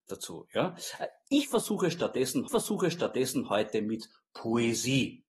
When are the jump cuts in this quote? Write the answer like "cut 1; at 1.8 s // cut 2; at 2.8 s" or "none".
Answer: cut 1; at 2.5 s